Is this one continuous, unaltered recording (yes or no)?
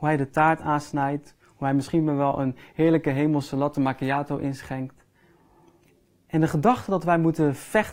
yes